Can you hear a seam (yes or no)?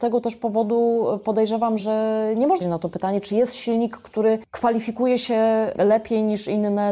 yes